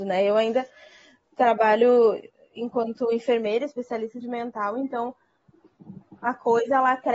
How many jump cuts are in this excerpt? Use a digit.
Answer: 1